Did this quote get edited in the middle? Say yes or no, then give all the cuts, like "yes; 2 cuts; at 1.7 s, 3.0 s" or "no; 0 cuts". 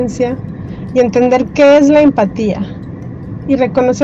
no; 0 cuts